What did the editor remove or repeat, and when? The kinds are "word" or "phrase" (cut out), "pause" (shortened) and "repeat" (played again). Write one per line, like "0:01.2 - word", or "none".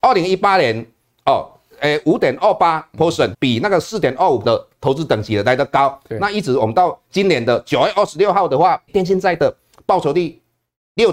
0:03.3 - word
0:04.4 - word
0:07.0 - pause
0:08.9 - word

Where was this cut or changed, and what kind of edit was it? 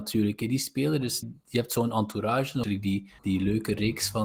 0:01.2 - word
0:02.6 - word
0:03.2 - pause

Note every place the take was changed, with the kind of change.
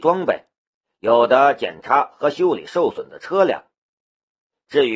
none

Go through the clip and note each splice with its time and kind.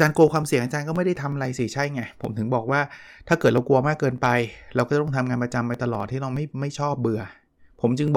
none

